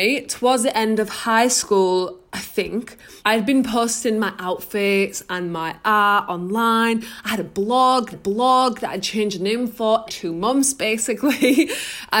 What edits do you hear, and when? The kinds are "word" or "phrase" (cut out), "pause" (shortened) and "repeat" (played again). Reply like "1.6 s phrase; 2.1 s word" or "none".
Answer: 2.3 s pause; 3.2 s pause; 8.1 s repeat; 10.1 s word